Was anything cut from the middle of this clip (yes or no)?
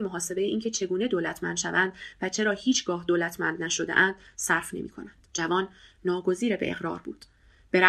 yes